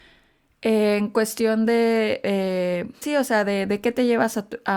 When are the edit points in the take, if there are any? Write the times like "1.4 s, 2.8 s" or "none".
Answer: 3.0 s